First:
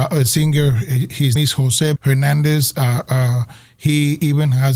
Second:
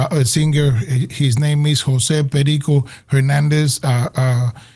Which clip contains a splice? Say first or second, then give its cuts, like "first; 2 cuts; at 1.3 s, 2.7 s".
first; 2 cuts; at 1.4 s, 2.0 s